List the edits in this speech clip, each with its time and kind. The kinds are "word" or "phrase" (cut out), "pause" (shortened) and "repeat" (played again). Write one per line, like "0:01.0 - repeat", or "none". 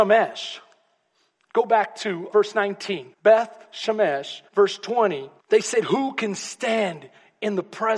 0:02.3 - word
0:03.1 - pause
0:04.5 - pause
0:05.4 - pause

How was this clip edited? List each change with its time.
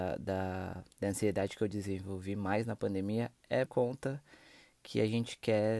0:00.9 - pause
0:03.7 - word

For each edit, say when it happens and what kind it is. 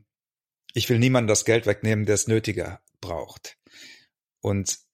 none

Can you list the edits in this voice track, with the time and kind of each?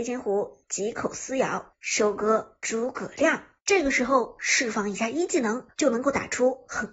0:03.6 - pause
0:05.7 - pause

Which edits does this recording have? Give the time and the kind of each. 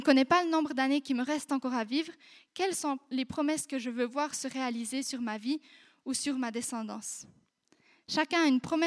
none

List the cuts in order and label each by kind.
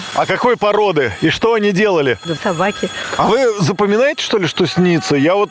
0:02.4 - word

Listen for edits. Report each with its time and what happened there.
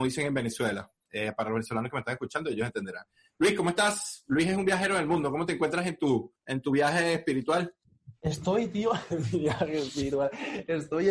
0:06.4 - pause

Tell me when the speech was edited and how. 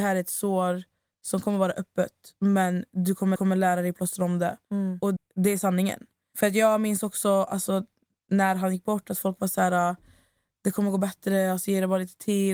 0:03.4 - repeat
0:04.6 - pause
0:05.2 - word

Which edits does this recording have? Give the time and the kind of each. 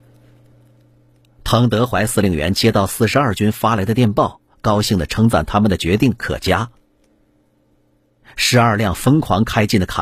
none

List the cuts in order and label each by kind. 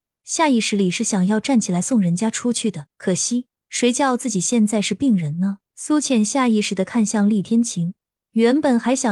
0:02.9 - pause
0:05.7 - pause

